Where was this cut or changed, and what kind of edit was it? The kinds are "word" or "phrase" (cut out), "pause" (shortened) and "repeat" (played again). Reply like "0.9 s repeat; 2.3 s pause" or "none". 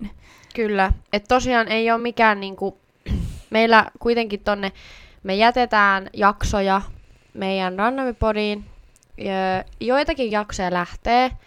none